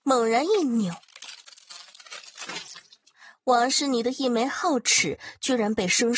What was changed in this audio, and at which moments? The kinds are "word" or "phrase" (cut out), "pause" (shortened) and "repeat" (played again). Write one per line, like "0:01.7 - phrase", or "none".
none